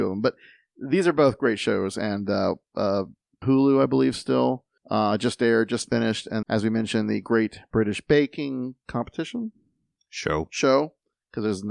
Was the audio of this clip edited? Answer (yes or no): yes